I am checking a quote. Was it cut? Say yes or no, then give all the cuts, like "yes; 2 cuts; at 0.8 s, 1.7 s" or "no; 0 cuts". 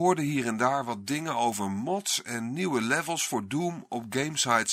no; 0 cuts